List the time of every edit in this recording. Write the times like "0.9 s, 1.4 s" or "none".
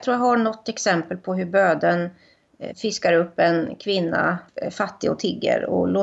4.5 s